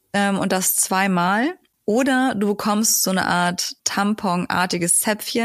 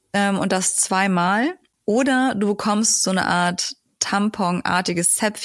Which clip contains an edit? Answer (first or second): first